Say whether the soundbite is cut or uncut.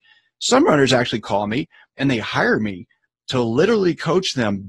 uncut